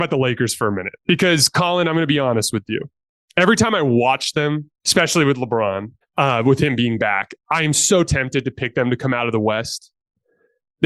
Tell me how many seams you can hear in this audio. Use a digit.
4